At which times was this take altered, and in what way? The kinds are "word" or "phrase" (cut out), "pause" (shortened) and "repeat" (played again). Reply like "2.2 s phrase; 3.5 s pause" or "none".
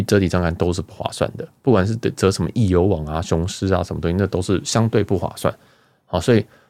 none